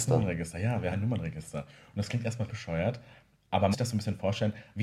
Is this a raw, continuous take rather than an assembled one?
no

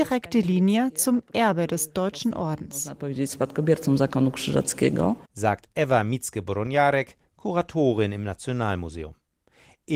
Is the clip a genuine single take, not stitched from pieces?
yes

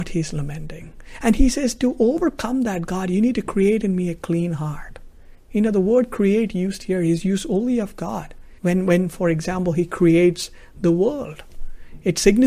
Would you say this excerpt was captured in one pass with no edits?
no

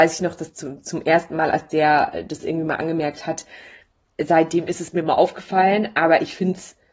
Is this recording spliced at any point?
no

